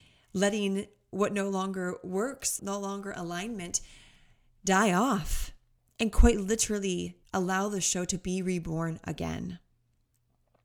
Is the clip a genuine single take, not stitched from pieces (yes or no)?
no